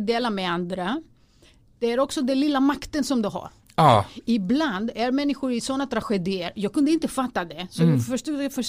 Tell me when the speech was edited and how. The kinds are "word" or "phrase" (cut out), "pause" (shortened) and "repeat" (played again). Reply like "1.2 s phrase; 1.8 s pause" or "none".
none

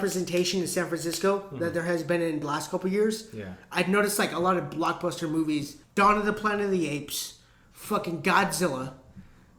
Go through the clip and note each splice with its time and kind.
2.4 s word; 5.8 s pause; 7.6 s pause

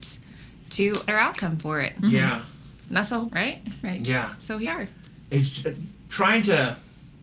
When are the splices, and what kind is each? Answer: 1.1 s word; 3.3 s word; 4.7 s word; 5.6 s word

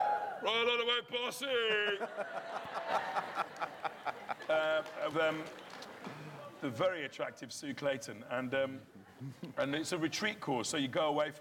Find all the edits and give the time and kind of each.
5.1 s word

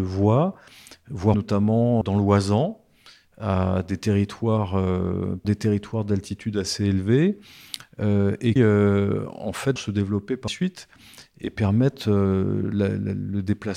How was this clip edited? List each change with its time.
1.3 s word; 2.0 s word; 5.4 s word; 8.6 s word; 9.8 s word; 10.5 s word

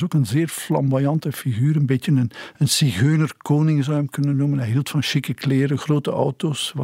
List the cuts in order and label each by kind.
none

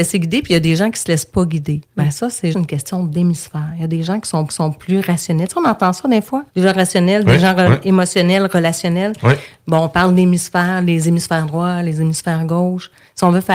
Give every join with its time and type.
1.8 s pause; 2.5 s word; 4.5 s repeat; 6.5 s pause

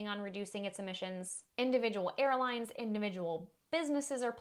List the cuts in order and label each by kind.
none

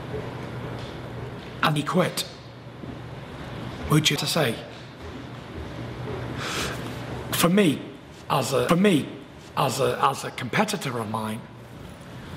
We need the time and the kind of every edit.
1.8 s word; 4.2 s word; 8.7 s repeat

